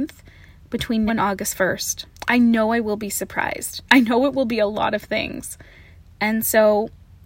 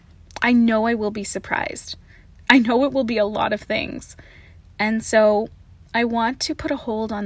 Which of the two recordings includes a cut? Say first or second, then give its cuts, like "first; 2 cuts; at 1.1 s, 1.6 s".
first; 3 cuts; at 1.1 s, 2.1 s, 3.9 s